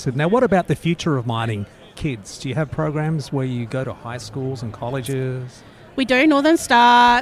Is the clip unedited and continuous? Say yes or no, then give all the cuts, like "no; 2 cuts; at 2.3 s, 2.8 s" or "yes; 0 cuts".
yes; 0 cuts